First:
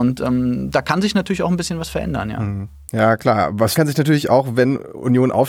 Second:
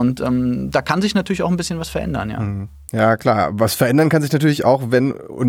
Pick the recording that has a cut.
first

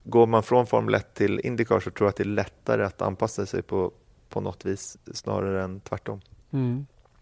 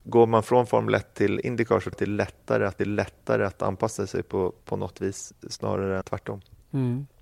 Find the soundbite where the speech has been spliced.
second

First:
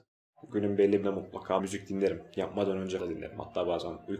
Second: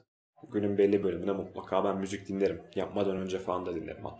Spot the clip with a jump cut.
first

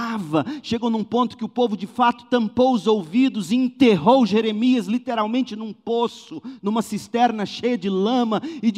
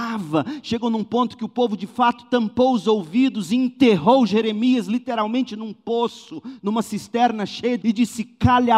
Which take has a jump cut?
second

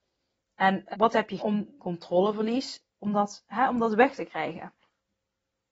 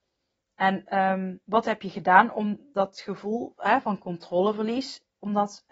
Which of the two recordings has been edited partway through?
first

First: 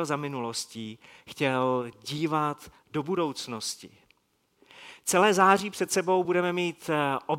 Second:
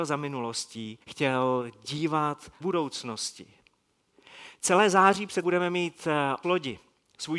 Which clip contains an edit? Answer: second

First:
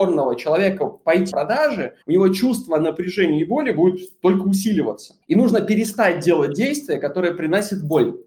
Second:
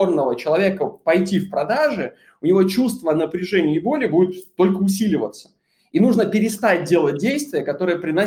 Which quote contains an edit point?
first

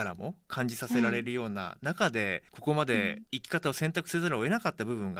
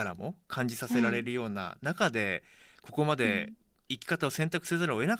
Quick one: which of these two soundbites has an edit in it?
first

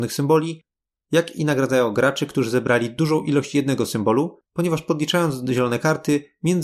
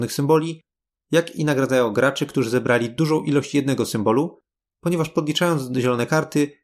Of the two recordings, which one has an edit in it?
first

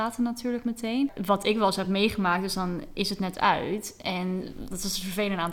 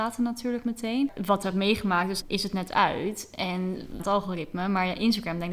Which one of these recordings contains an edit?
second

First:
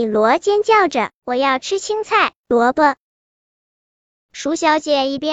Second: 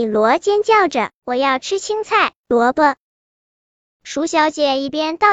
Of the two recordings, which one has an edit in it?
second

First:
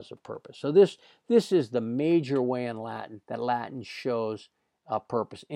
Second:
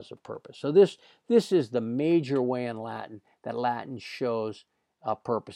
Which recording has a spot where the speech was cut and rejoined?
first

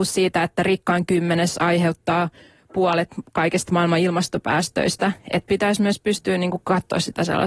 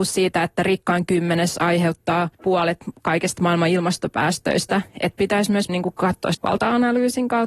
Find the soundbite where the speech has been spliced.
second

